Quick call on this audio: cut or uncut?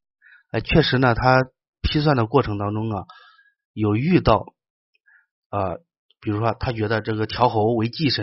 uncut